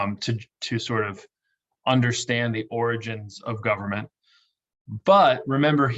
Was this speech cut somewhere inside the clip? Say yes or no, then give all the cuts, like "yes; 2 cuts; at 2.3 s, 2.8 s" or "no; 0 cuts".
no; 0 cuts